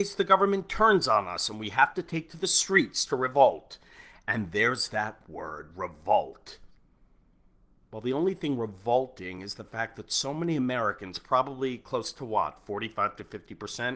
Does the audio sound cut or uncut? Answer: uncut